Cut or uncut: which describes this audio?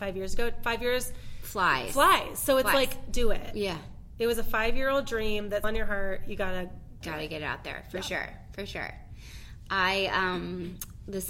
cut